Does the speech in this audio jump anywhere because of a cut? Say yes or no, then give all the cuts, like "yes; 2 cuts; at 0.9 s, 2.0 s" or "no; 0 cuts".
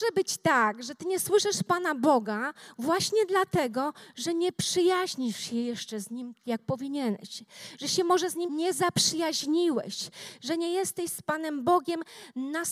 yes; 2 cuts; at 6.4 s, 8.5 s